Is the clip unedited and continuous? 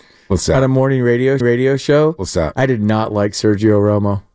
no; 1 cut; at 1.4 s

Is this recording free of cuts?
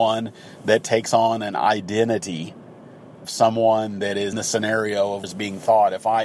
no; 3 cuts; at 3.2 s, 4.3 s, 5.2 s

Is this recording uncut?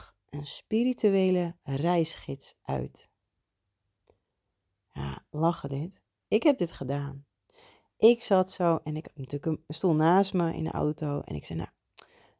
yes; 0 cuts

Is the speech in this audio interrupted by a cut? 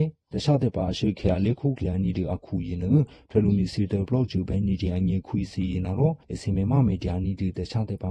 yes; 1 cut; at 6.2 s

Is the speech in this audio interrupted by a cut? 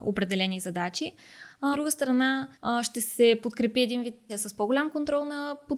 yes; 3 cuts; at 1.7 s, 2.5 s, 4.3 s

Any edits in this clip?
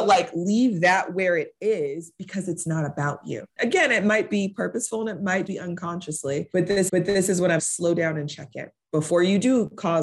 yes; 4 cuts; at 3.5 s, 5.5 s, 6.9 s, 7.6 s

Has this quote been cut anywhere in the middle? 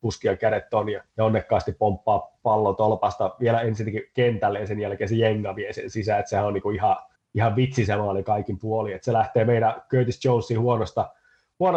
yes; 2 cuts; at 1.1 s, 7.1 s

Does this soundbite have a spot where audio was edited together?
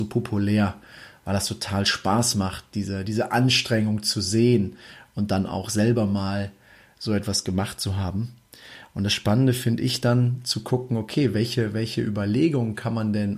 no; 0 cuts

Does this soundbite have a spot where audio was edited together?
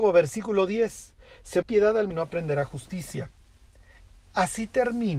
yes; 2 cuts; at 1.6 s, 2.1 s

